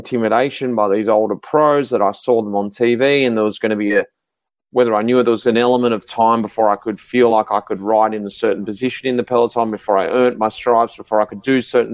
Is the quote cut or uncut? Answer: uncut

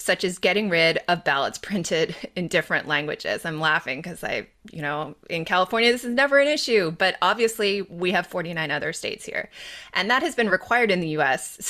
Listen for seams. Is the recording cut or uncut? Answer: uncut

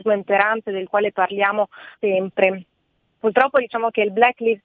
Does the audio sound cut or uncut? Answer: cut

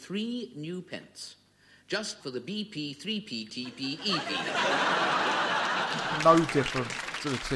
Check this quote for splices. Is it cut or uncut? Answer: cut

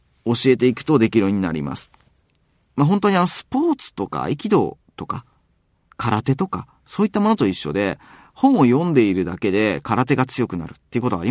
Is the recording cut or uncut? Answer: uncut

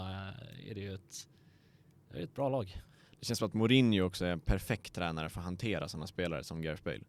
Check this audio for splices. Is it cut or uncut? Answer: uncut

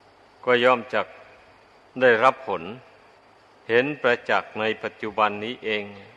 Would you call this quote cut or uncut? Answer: uncut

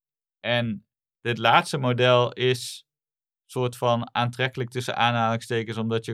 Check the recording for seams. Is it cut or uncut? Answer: uncut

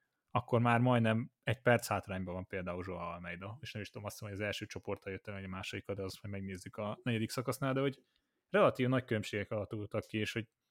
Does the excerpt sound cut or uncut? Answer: uncut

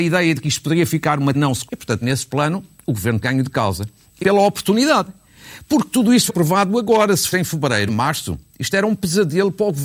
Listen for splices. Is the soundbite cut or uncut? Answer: cut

